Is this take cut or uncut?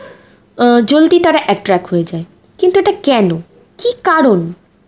uncut